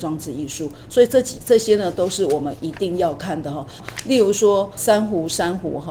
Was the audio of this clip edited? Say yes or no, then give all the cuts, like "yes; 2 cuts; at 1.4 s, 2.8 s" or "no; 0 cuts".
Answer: yes; 1 cut; at 4.8 s